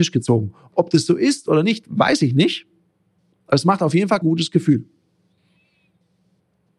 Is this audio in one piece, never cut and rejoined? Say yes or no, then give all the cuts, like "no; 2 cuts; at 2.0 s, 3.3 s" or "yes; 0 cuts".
no; 1 cut; at 4.2 s